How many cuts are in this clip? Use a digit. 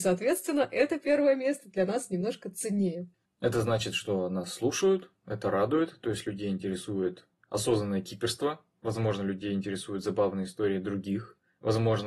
1